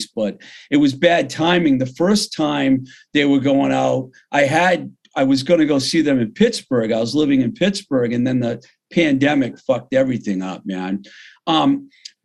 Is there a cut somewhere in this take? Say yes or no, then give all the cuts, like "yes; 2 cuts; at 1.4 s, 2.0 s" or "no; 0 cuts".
no; 0 cuts